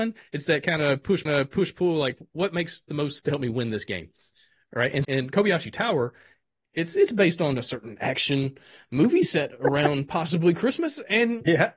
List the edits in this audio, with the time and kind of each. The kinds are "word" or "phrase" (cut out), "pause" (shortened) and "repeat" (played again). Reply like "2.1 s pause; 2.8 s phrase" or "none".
1.3 s repeat; 3.2 s word; 5.0 s word